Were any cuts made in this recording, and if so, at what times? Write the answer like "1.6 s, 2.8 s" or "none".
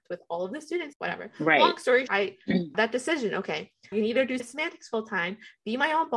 0.9 s, 2.1 s, 2.7 s, 3.9 s, 4.4 s